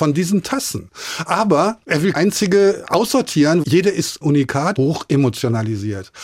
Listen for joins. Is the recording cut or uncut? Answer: cut